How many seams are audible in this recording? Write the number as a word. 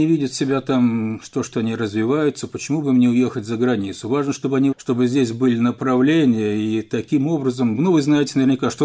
one